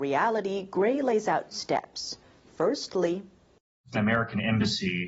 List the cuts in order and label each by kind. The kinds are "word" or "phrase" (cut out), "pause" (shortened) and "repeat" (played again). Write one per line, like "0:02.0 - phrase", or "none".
0:01.5 - word
0:03.9 - phrase